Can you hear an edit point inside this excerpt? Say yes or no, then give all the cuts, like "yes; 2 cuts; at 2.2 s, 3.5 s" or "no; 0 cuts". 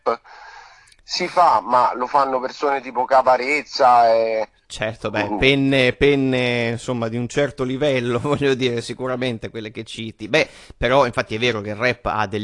no; 0 cuts